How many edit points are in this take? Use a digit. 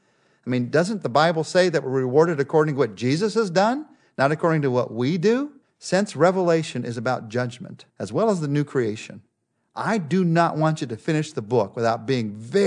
2